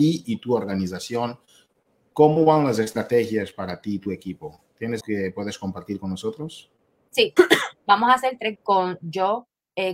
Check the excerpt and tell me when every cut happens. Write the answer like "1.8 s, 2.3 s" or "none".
5.0 s, 7.4 s, 8.5 s

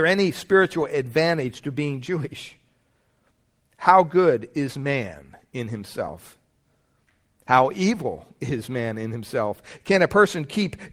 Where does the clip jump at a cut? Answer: none

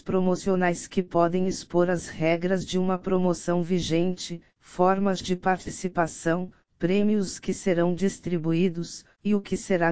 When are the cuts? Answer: none

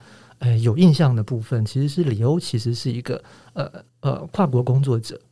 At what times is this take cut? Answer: 3.9 s

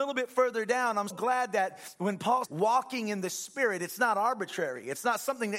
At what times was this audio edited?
1.1 s, 2.4 s

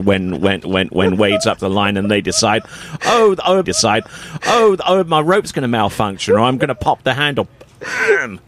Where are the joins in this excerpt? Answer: 1.4 s, 3.6 s

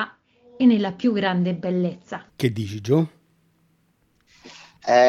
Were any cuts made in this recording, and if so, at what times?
2.3 s

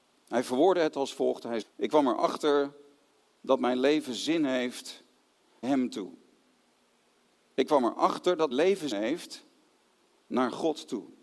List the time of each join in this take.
1.6 s, 5.6 s, 8.5 s, 8.9 s

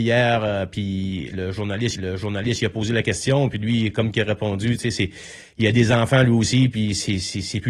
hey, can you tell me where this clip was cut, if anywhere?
1.9 s

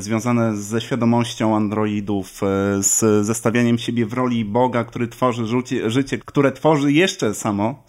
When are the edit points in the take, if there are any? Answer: 6.2 s

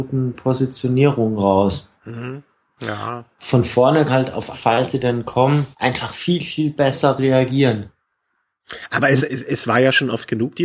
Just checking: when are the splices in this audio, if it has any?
2.0 s, 3.3 s, 4.1 s, 4.5 s, 5.7 s, 9.3 s

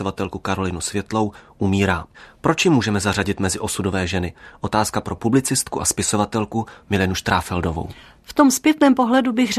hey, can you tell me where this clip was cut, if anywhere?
none

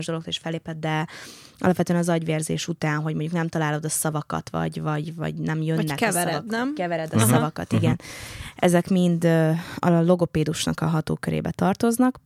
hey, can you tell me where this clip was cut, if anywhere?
none

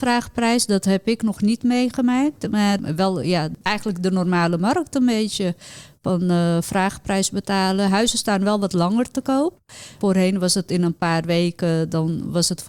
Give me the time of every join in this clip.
none

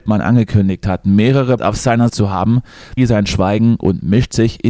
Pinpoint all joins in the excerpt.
1.6 s, 2.1 s, 3.0 s

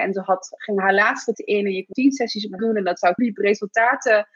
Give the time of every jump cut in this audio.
1.3 s, 1.9 s, 2.6 s, 3.2 s

